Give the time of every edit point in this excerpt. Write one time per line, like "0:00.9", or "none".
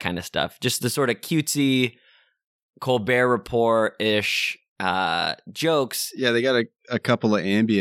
none